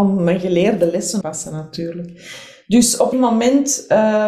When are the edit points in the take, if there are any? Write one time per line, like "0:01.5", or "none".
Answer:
0:01.2
0:03.1